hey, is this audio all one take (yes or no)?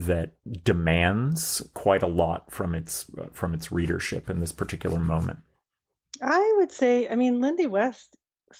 yes